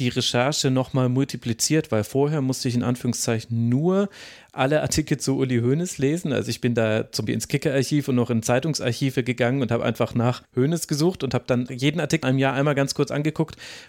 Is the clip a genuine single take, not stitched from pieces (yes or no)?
no